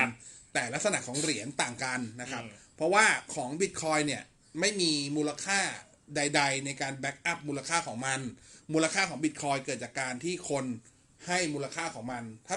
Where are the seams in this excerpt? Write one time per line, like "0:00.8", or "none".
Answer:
none